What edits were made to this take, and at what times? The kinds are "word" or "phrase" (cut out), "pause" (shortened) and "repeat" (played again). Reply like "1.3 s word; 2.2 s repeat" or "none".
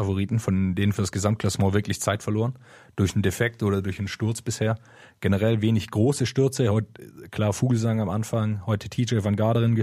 none